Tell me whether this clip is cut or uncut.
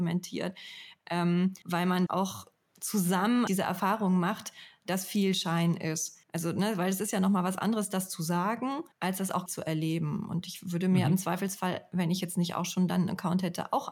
cut